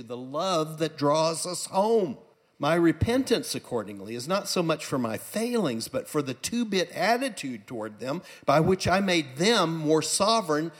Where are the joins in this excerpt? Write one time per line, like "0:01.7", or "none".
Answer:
0:02.3